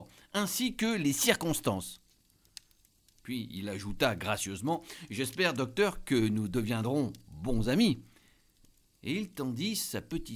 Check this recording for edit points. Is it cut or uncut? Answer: uncut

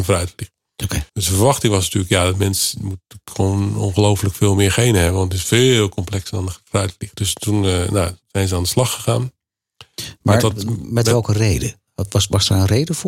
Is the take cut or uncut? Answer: cut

